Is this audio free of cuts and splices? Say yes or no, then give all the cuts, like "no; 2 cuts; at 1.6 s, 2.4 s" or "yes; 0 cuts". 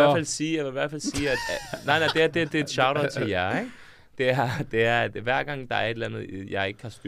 yes; 0 cuts